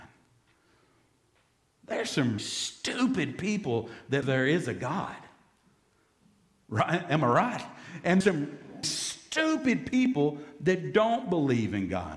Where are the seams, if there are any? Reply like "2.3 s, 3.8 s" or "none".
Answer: 2.4 s, 4.2 s, 8.2 s, 8.8 s